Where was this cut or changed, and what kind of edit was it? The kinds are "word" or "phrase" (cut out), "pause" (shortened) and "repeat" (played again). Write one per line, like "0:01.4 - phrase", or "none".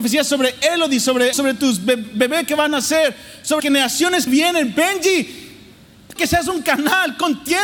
0:01.3 - word
0:03.6 - word
0:04.3 - word
0:06.2 - word